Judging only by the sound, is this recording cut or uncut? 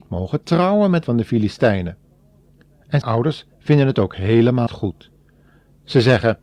cut